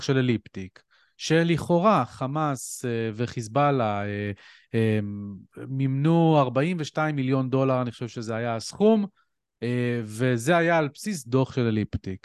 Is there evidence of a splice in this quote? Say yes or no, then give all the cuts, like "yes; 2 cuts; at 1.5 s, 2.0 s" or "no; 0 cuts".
no; 0 cuts